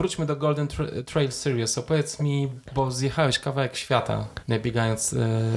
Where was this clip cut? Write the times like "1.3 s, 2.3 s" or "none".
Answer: none